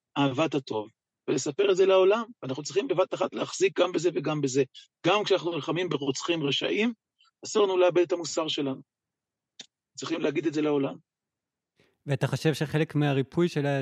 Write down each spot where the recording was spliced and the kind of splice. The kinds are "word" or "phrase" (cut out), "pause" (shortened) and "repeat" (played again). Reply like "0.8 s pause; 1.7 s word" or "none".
none